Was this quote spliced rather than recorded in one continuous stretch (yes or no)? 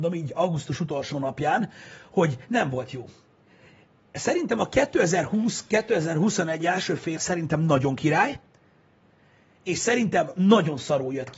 yes